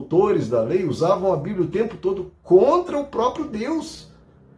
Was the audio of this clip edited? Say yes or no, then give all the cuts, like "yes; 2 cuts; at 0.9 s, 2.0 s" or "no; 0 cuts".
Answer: no; 0 cuts